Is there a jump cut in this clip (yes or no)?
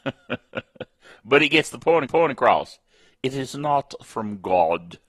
yes